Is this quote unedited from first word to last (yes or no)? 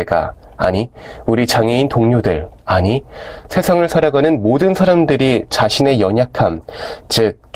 no